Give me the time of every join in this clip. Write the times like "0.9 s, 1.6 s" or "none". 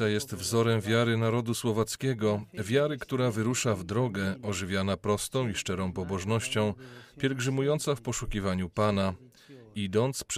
none

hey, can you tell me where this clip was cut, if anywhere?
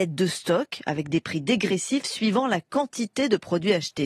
none

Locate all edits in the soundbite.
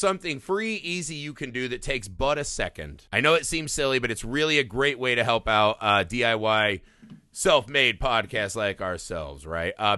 3.1 s

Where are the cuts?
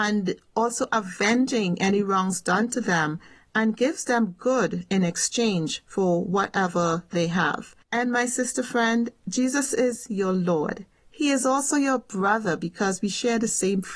none

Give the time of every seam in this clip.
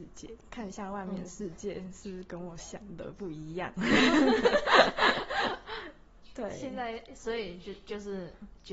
none

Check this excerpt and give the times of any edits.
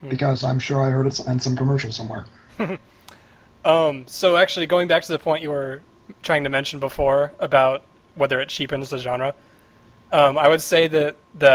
none

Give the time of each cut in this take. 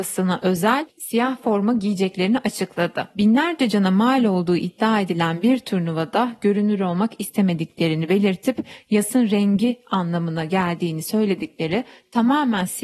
none

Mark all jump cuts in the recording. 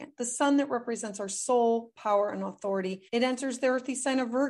3.1 s

